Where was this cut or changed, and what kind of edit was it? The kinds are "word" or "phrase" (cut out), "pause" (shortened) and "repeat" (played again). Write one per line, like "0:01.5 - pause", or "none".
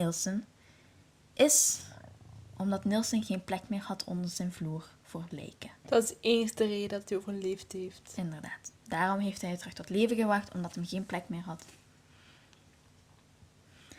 0:05.8 - pause
0:08.7 - pause